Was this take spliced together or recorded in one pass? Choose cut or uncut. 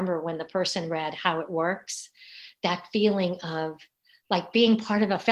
uncut